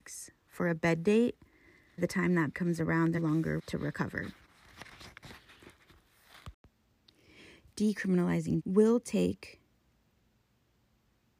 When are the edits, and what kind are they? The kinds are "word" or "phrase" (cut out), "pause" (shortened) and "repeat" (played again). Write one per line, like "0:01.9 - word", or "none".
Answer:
0:02.0 - word
0:02.5 - word
0:03.2 - word
0:03.6 - word
0:08.6 - word